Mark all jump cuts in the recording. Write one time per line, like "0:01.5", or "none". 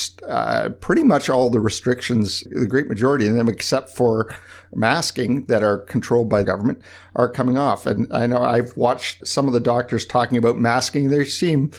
0:02.5
0:06.4
0:09.2